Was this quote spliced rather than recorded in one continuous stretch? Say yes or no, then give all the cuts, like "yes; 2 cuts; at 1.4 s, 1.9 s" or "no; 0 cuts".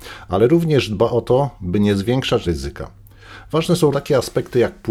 yes; 2 cuts; at 2.4 s, 3.9 s